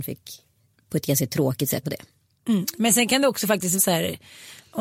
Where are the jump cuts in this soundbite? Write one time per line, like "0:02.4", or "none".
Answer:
0:01.8
0:03.8